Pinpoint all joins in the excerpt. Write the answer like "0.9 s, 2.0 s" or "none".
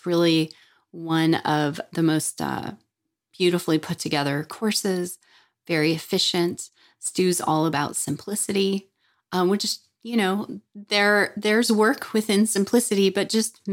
none